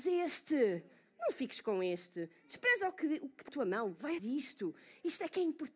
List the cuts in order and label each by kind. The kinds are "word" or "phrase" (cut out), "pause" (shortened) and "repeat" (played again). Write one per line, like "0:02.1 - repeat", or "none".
0:03.5 - word
0:04.2 - word